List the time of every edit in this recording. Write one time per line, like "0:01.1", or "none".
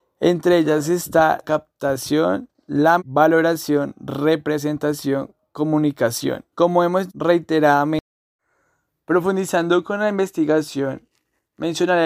0:01.4
0:03.0
0:06.5
0:07.1